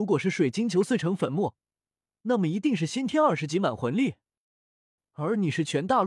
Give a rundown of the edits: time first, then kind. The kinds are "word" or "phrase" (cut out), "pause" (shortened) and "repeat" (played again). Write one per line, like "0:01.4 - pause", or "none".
none

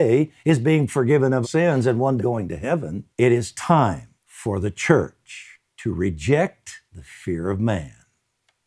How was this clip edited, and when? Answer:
0:01.4 - word
0:02.2 - word
0:03.1 - pause
0:04.2 - pause
0:05.7 - pause
0:06.9 - pause

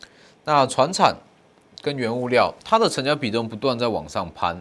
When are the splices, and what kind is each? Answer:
0:02.6 - pause

